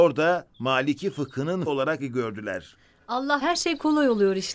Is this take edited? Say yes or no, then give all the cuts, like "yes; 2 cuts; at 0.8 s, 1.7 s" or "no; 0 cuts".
yes; 3 cuts; at 1.7 s, 2.0 s, 3.4 s